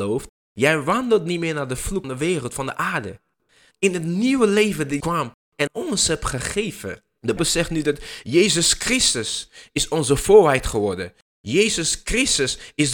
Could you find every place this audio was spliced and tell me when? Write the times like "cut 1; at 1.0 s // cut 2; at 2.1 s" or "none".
cut 1; at 2.0 s // cut 2; at 5.0 s // cut 3; at 5.7 s // cut 4; at 7.4 s

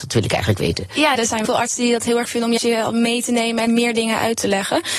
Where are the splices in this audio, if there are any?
cut 1; at 1.2 s // cut 2; at 1.5 s // cut 3; at 2.3 s // cut 4; at 2.6 s // cut 5; at 3.7 s

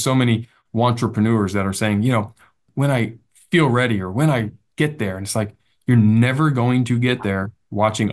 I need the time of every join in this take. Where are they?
none

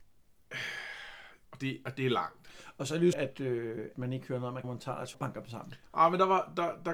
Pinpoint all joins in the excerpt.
cut 1; at 1.4 s // cut 2; at 3.1 s // cut 3; at 3.9 s // cut 4; at 4.6 s // cut 5; at 5.1 s

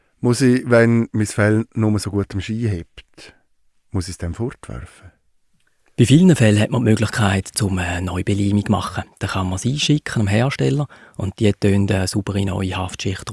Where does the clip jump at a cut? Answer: none

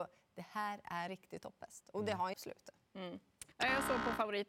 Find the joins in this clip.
cut 1; at 1.1 s // cut 2; at 2.3 s // cut 3; at 2.8 s // cut 4; at 3.5 s

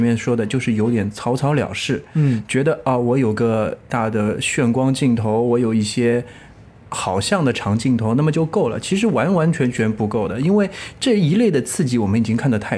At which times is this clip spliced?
none

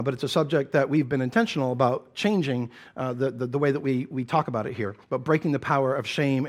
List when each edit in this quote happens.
cut 1; at 5.0 s

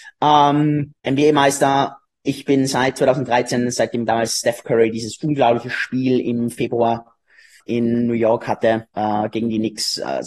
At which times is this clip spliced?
cut 1; at 1.0 s // cut 2; at 7.6 s // cut 3; at 8.9 s

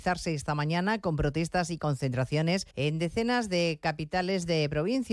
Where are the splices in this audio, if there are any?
cut 1; at 2.7 s

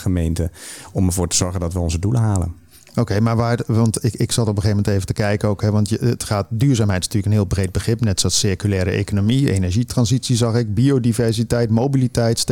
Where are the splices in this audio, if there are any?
none

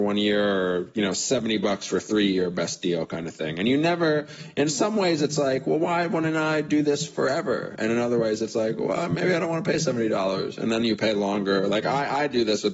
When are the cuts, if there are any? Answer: none

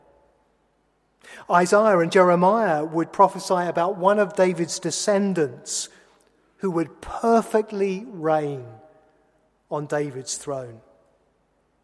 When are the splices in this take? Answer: none

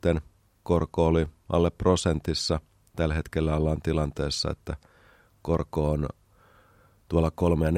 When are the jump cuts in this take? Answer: none

